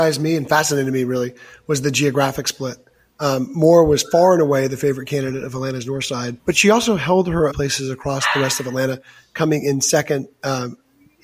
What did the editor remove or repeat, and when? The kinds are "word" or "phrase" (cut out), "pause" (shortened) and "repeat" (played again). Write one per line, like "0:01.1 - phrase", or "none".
0:06.4 - pause
0:07.5 - phrase